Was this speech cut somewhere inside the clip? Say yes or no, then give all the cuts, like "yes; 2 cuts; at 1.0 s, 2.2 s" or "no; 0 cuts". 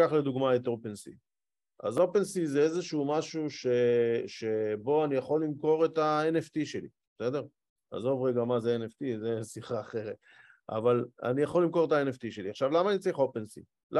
no; 0 cuts